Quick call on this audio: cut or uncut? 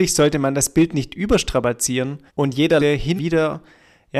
cut